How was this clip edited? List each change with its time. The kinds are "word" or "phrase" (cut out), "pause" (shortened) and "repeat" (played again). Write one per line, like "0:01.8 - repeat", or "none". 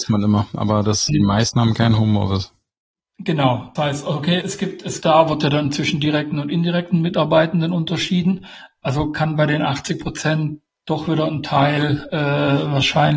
0:01.1 - word
0:03.8 - word
0:04.4 - word
0:05.0 - phrase